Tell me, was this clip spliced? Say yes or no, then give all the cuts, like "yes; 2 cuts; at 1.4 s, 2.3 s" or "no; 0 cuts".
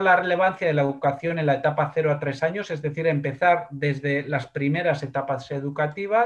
no; 0 cuts